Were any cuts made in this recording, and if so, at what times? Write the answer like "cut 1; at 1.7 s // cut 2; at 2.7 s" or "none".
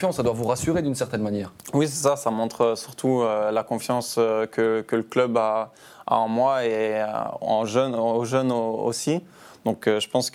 none